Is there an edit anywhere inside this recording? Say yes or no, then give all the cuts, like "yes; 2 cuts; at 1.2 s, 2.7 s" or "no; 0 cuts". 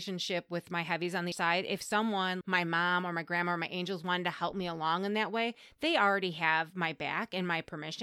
yes; 2 cuts; at 1.3 s, 2.4 s